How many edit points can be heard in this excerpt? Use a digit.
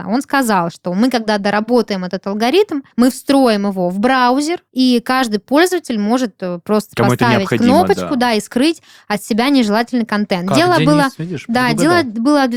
2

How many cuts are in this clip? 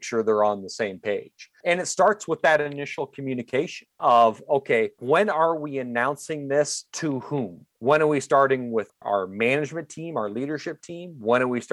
0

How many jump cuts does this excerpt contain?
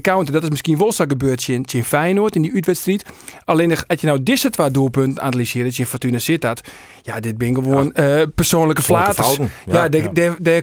0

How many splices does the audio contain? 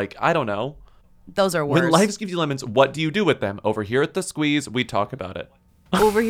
0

